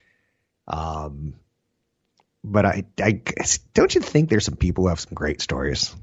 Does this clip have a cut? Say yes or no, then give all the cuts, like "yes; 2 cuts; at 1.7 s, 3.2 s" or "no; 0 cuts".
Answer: no; 0 cuts